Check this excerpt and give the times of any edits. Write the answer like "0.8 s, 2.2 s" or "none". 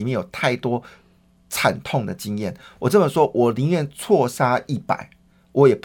none

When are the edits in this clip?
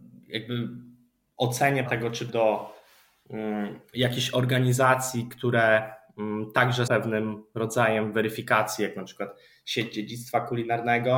1.9 s, 2.3 s, 6.9 s

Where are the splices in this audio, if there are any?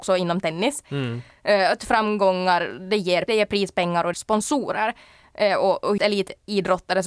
1.8 s, 3.3 s, 4.1 s, 6.0 s

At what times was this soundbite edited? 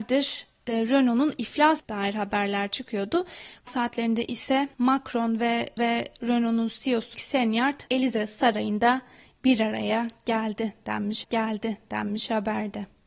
1.8 s, 3.7 s, 4.7 s, 5.8 s, 7.1 s, 7.9 s, 11.2 s

